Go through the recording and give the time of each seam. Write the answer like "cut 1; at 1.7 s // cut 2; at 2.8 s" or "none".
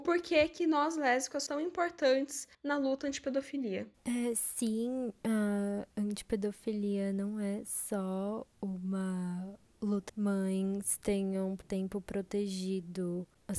cut 1; at 1.5 s // cut 2; at 2.5 s // cut 3; at 3.9 s // cut 4; at 10.1 s // cut 5; at 11.6 s